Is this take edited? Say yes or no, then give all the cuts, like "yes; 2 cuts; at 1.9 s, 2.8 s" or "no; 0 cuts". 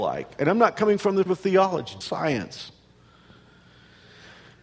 yes; 2 cuts; at 1.3 s, 2.0 s